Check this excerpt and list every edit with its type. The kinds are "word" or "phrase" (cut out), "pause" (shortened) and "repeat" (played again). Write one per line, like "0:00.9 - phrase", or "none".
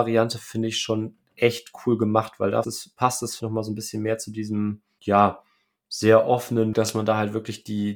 0:02.6 - word
0:03.4 - word
0:06.7 - word

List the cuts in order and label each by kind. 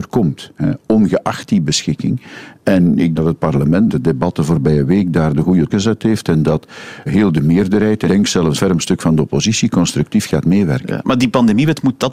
0:03.2 - word
0:03.9 - word
0:05.7 - word
0:07.1 - word
0:08.1 - word
0:08.6 - word

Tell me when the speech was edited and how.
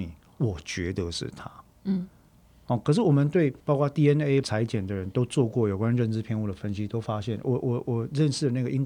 0:03.6 - pause
0:04.4 - phrase

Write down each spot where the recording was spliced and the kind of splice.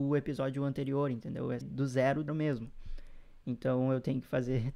0:01.6 - word
0:02.3 - word

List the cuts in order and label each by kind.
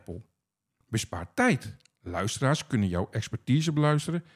none

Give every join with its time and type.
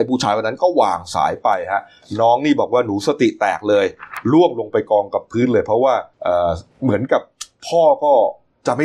0:06.1 - pause
0:06.7 - pause

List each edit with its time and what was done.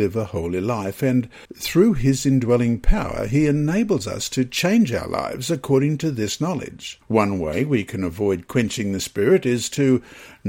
0:01.4 - pause
0:07.0 - pause

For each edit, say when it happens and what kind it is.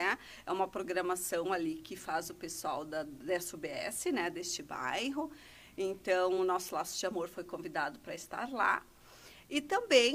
none

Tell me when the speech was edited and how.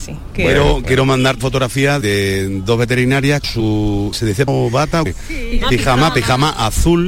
0:01.4 - word
0:02.0 - word
0:03.4 - word
0:04.1 - word
0:04.5 - word
0:05.1 - word
0:05.6 - word

